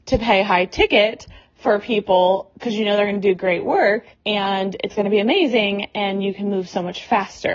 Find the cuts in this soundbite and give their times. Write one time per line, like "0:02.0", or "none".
0:04.1